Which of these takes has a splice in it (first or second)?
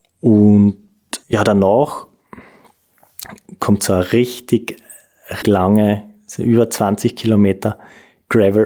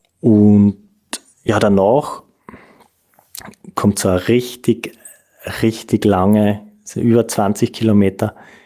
first